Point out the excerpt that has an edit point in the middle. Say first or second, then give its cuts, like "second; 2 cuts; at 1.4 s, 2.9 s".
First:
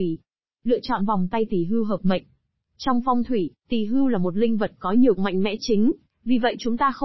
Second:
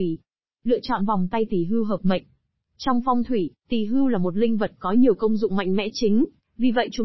first; 1 cut; at 5.2 s